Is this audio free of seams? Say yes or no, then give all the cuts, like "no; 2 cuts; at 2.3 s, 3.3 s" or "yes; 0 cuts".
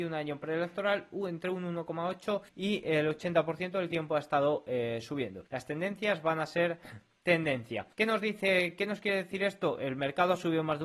no; 3 cuts; at 2.5 s, 5.5 s, 7.9 s